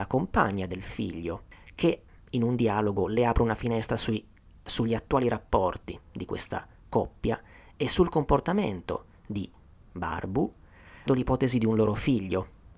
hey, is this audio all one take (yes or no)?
no